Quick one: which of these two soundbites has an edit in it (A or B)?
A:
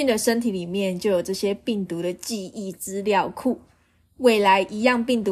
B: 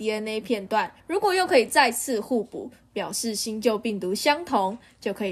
B